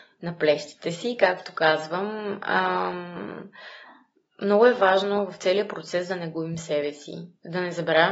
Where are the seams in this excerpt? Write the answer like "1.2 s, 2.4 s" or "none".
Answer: none